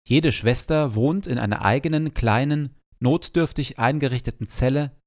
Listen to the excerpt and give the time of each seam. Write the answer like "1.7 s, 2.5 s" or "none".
none